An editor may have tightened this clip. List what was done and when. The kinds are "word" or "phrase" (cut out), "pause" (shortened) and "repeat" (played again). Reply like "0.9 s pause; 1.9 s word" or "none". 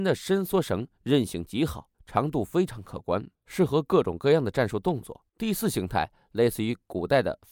1.9 s pause; 3.4 s pause; 5.3 s pause